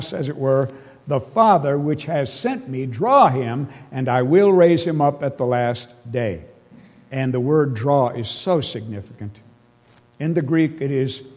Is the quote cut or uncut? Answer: uncut